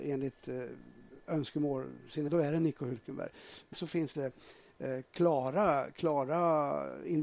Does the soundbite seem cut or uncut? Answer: cut